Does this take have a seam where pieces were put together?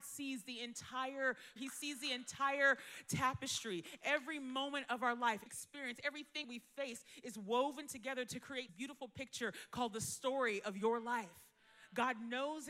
yes; 4 cuts; at 1.6 s, 5.5 s, 6.4 s, 8.7 s

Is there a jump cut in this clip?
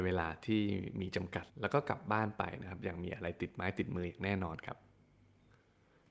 yes; 1 cut; at 1.5 s

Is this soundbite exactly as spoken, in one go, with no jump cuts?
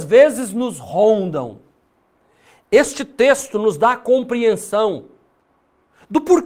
yes; 0 cuts

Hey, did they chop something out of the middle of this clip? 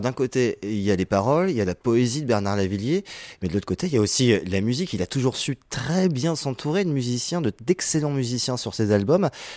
no; 0 cuts

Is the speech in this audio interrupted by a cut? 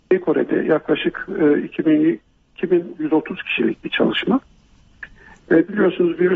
no; 0 cuts

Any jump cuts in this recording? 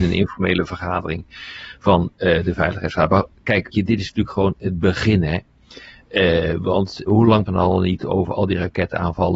yes; 3 cuts; at 3.7 s, 7.1 s, 7.5 s

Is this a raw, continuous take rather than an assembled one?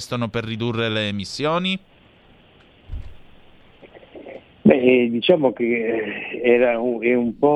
yes; 0 cuts

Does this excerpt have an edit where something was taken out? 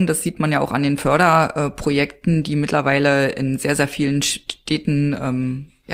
no; 0 cuts

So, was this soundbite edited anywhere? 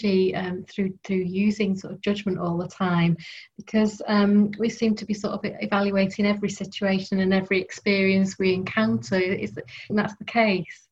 yes; 1 cut; at 9.9 s

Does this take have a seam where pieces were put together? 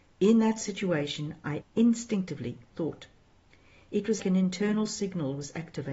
yes; 3 cuts; at 1.6 s, 2.7 s, 4.2 s

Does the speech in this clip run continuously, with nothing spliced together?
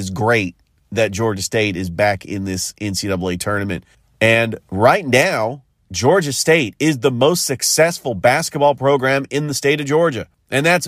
yes; 0 cuts

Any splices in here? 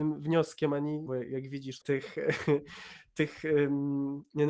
yes; 2 cuts; at 1.1 s, 1.8 s

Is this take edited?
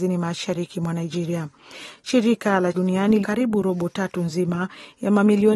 yes; 2 cuts; at 2.7 s, 3.2 s

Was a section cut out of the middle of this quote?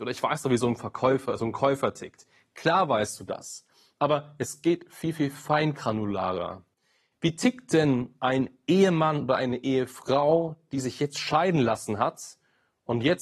no; 0 cuts

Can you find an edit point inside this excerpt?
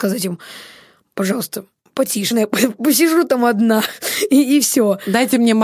yes; 1 cut; at 2.3 s

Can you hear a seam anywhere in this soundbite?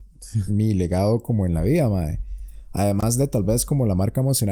no; 0 cuts

